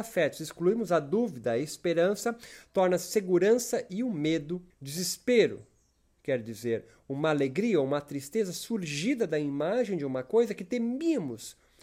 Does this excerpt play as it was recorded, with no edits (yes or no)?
no